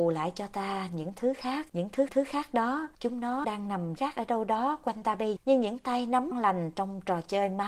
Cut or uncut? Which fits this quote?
cut